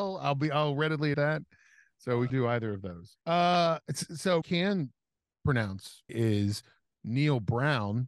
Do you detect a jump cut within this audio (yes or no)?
yes